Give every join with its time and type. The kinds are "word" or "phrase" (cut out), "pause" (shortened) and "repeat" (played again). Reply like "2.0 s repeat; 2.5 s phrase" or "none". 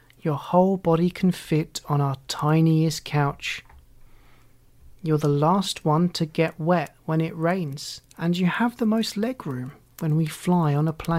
8.1 s pause